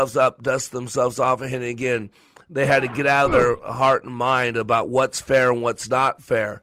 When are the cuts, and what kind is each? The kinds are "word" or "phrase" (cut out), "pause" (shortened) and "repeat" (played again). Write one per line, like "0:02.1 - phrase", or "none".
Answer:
none